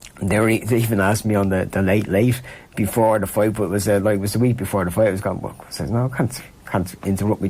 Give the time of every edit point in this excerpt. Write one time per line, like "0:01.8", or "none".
none